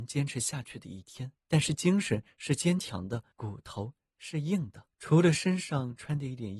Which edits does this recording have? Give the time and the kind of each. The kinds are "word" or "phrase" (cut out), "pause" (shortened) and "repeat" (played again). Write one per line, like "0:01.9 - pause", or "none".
0:01.4 - pause
0:03.3 - pause
0:04.9 - pause